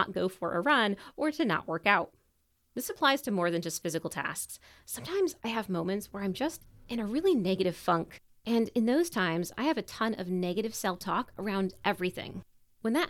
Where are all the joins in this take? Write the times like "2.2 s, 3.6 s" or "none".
none